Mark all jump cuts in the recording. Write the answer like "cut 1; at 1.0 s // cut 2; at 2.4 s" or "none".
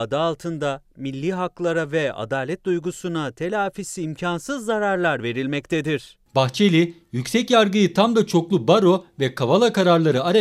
none